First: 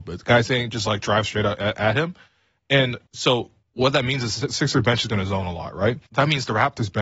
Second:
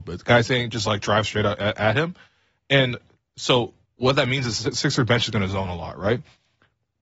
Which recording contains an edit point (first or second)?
first